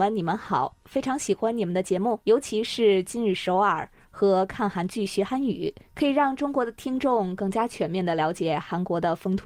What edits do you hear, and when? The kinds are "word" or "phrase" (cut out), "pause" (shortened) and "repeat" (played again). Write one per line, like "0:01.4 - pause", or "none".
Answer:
0:02.2 - pause
0:05.9 - pause